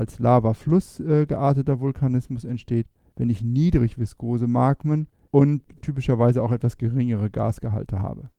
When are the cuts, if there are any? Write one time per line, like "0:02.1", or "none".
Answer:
none